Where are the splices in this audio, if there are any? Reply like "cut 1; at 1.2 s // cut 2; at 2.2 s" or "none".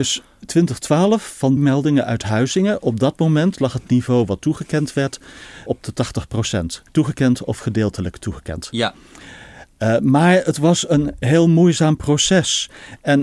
cut 1; at 1.6 s // cut 2; at 5.7 s // cut 3; at 6.9 s